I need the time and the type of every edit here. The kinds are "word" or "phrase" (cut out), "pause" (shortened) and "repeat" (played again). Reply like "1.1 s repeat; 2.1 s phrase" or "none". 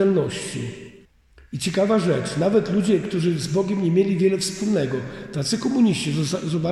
1.0 s pause